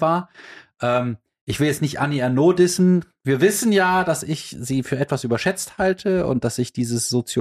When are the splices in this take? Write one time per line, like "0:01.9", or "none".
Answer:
none